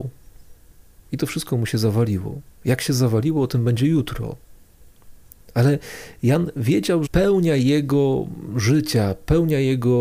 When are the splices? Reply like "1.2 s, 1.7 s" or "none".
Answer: 7.1 s